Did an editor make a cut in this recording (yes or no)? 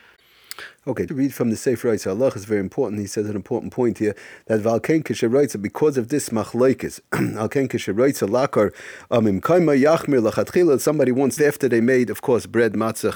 yes